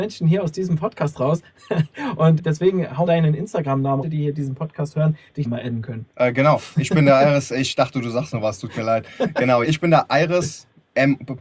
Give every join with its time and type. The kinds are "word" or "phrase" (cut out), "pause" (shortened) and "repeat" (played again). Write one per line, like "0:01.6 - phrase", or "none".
0:02.4 - word
0:03.1 - word
0:04.0 - phrase
0:05.4 - phrase
0:06.1 - pause
0:09.6 - word